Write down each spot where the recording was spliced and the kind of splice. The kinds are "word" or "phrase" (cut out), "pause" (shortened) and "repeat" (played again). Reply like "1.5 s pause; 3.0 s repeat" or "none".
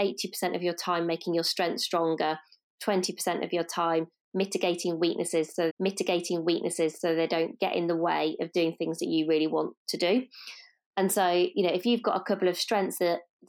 5.7 s repeat